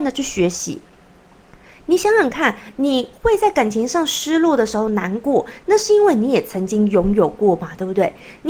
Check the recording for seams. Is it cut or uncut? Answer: uncut